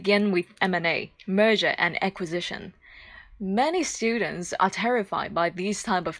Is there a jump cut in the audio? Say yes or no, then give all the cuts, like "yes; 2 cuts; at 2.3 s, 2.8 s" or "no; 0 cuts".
yes; 1 cut; at 1.2 s